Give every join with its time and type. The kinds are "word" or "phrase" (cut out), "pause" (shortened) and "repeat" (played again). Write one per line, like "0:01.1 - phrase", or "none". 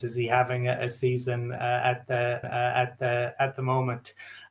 0:02.4 - repeat